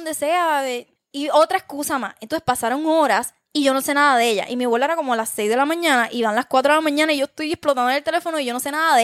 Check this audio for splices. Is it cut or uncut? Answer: cut